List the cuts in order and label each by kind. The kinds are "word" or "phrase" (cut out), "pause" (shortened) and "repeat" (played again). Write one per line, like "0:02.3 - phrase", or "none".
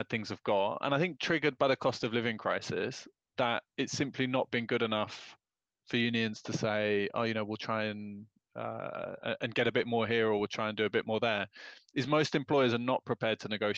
0:03.7 - pause